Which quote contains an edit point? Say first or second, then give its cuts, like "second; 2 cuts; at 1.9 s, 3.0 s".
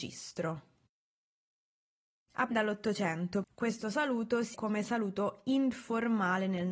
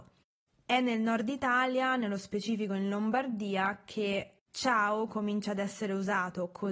first; 3 cuts; at 2.5 s, 3.4 s, 4.5 s